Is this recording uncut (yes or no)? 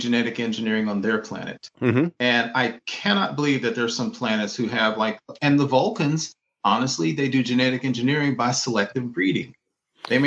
yes